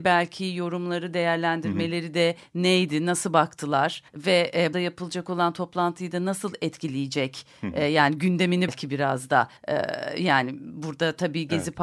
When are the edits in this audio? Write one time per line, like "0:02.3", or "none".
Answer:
0:04.1
0:04.7
0:08.7
0:09.6